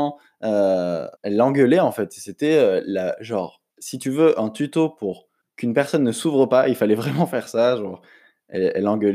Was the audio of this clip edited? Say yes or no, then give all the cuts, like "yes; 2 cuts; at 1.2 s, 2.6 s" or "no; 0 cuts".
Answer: yes; 3 cuts; at 1.2 s, 3.7 s, 5.4 s